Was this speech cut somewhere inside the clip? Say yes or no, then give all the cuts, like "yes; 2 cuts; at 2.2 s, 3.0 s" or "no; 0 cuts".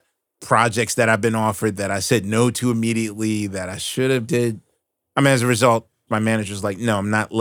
no; 0 cuts